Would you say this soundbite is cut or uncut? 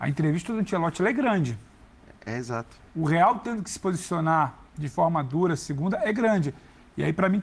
uncut